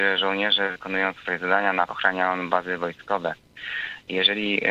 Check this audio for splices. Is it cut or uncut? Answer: cut